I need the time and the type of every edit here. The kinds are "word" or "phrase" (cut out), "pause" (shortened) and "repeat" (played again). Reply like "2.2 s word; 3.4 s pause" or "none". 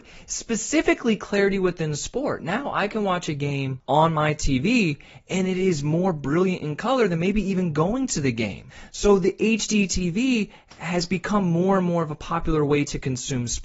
none